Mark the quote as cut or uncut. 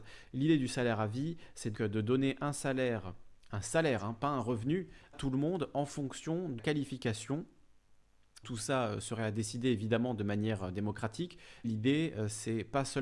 cut